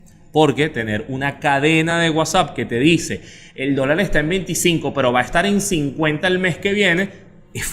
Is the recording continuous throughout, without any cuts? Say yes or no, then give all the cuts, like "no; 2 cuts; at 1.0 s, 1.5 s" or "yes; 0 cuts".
yes; 0 cuts